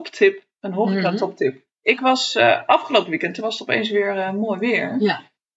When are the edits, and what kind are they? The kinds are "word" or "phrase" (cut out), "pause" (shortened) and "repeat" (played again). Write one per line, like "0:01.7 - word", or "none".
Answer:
0:01.7 - pause